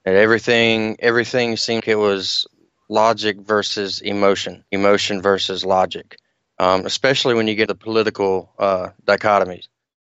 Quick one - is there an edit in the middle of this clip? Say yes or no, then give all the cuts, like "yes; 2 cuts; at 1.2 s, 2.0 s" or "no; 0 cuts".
yes; 3 cuts; at 1.8 s, 4.7 s, 7.7 s